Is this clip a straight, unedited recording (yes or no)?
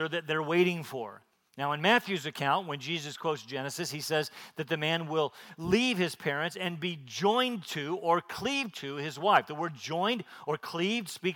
yes